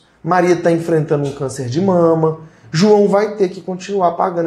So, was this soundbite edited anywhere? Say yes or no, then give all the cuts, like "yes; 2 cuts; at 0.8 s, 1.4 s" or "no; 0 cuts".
no; 0 cuts